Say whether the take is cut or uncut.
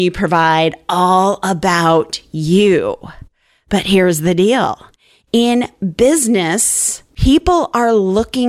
cut